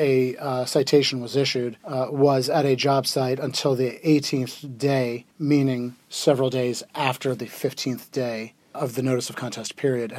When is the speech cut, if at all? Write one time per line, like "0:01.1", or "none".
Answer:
0:01.8
0:05.3
0:08.7